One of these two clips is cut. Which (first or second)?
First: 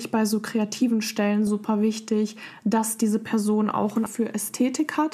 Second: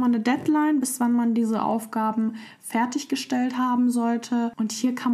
first